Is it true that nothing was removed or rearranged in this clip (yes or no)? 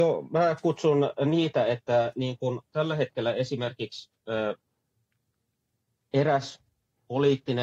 yes